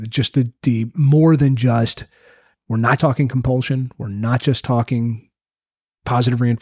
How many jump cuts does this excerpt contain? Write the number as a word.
two